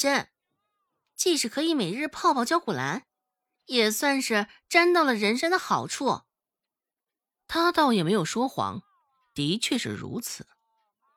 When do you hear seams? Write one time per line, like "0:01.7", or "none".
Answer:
none